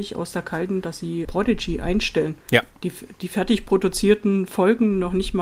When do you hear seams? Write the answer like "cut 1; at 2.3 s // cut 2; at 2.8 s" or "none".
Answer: cut 1; at 1.2 s // cut 2; at 2.4 s